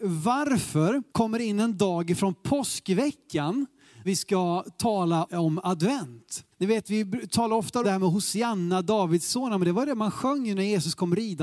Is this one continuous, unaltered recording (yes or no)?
no